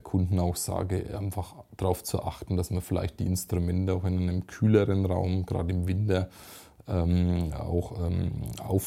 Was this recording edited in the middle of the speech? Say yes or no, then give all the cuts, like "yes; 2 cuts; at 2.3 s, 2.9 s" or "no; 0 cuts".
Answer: no; 0 cuts